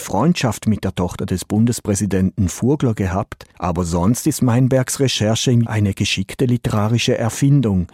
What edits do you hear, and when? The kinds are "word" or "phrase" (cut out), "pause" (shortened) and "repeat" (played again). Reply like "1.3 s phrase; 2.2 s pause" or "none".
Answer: 3.5 s pause; 5.6 s word